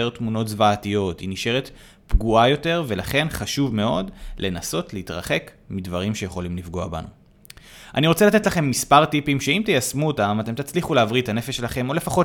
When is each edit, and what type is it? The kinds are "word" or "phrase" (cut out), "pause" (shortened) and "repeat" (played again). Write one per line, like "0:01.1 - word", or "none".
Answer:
none